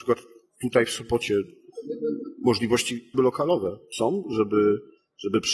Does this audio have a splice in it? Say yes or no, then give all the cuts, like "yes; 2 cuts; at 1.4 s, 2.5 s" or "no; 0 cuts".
yes; 1 cut; at 3.1 s